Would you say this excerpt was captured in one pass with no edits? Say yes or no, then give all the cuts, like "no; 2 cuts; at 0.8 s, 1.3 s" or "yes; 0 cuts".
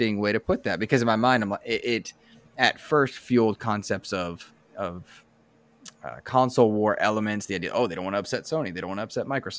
yes; 0 cuts